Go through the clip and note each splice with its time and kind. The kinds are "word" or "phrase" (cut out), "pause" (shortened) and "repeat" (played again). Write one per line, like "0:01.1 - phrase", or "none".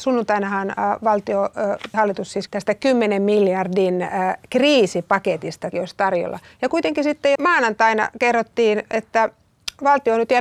0:01.9 - word
0:02.5 - word
0:05.7 - word
0:07.4 - word